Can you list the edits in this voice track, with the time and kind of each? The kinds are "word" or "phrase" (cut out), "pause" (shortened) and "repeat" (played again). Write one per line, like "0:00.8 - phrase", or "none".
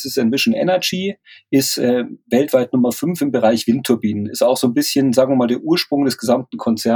none